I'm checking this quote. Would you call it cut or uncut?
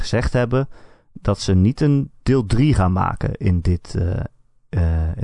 uncut